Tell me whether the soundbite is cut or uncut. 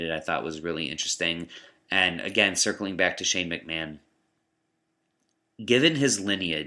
uncut